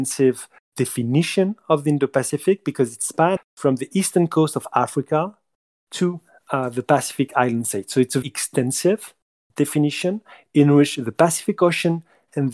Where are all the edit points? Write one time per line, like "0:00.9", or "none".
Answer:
0:03.4
0:08.2